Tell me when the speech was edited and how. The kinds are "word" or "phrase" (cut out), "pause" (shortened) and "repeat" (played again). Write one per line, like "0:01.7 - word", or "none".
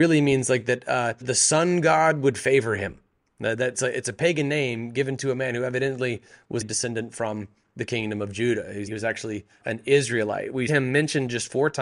0:01.2 - word
0:03.7 - word
0:06.6 - word
0:08.9 - word
0:09.6 - word
0:10.7 - word

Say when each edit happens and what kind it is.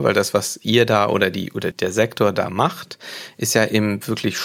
0:01.7 - word

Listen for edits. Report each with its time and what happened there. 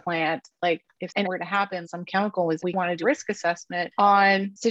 0:01.2 - word
0:01.8 - word
0:02.6 - word
0:03.0 - word

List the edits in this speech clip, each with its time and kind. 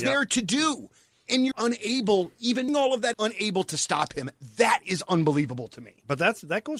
0:01.5 - word
0:02.7 - word
0:03.1 - word

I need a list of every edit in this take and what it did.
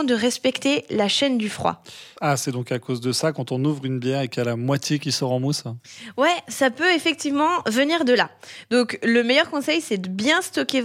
none

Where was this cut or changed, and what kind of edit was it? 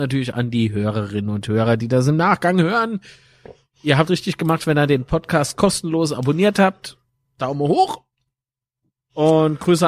0:04.1 - word

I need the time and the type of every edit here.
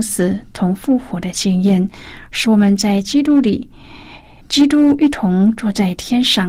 0:04.4 - pause

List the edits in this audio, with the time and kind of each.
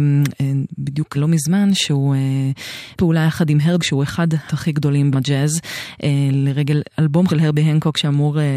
0:01.1 - word
0:03.0 - word
0:03.8 - word
0:04.5 - word
0:05.1 - word
0:07.3 - word

